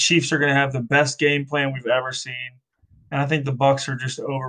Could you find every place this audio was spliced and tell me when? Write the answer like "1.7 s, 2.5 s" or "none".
none